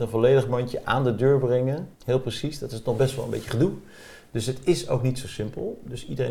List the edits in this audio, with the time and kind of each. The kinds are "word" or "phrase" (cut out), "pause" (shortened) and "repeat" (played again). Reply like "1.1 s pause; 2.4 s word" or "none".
1.9 s pause

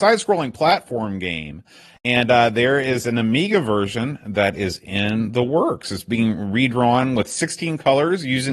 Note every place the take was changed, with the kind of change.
none

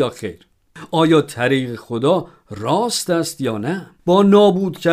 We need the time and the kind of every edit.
3.9 s pause

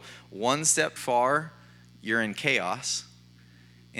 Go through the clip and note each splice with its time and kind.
1.0 s word

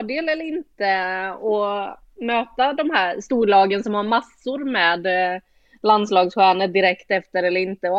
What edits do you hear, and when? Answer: none

